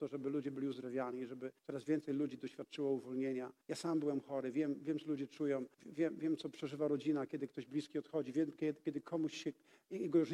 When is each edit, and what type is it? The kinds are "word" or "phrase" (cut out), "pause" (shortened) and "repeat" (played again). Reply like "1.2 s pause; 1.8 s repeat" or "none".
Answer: 1.6 s pause; 3.6 s pause; 5.7 s pause